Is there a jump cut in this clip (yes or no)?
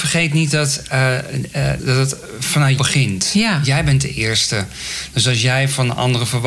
yes